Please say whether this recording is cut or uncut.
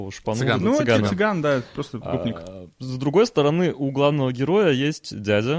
uncut